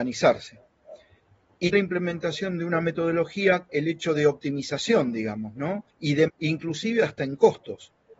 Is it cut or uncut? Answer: cut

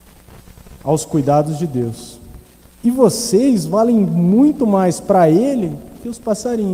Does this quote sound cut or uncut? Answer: cut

